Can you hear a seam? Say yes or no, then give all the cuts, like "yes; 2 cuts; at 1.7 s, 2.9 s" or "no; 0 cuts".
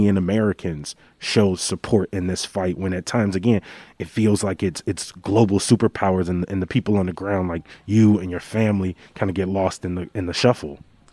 no; 0 cuts